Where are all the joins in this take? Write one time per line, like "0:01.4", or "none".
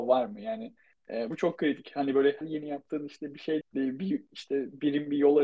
0:01.3
0:02.4
0:03.6